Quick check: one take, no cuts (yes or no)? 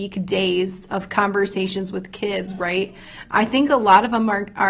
yes